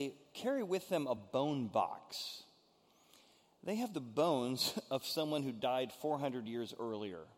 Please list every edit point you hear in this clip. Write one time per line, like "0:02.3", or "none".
none